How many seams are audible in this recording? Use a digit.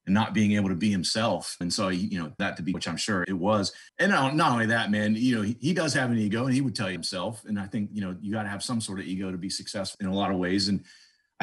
7